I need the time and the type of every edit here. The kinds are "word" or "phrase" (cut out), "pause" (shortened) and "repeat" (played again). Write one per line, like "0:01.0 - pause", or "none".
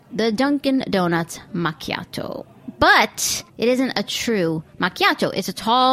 0:01.5 - pause
0:03.5 - pause

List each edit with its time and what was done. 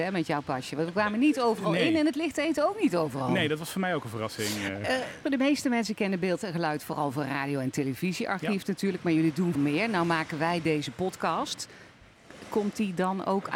0:05.2 - word
0:09.5 - word

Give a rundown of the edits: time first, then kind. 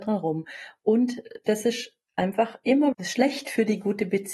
0:02.9 - word

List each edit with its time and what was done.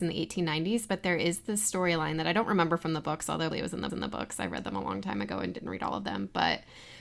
0:03.5 - word
0:03.9 - repeat

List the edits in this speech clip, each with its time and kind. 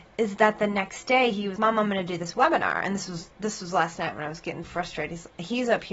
0:01.6 - word
0:03.3 - pause
0:04.6 - word

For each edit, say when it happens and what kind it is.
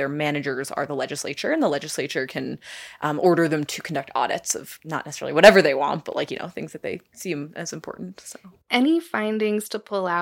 none

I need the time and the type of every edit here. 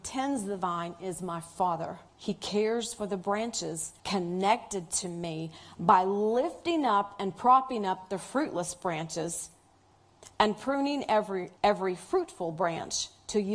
0:02.1 - pause
0:04.0 - pause
0:11.6 - pause

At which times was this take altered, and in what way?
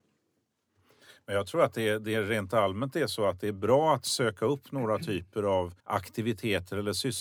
0:05.8 - pause

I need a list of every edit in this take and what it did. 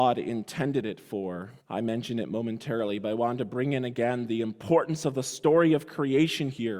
0:01.6 - pause

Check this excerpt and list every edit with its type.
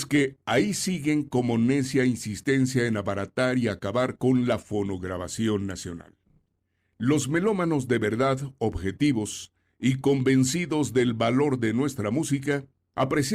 none

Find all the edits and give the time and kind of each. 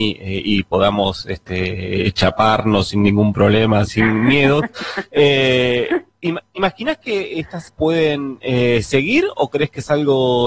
0:03.9 - word
0:07.7 - word

